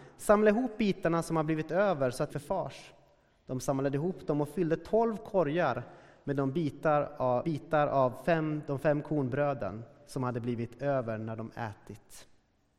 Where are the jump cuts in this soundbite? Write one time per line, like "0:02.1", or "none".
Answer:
0:02.3
0:07.4